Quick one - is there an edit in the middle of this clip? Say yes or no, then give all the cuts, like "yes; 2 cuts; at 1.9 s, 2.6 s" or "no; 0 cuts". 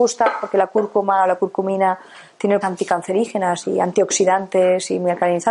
yes; 1 cut; at 2.6 s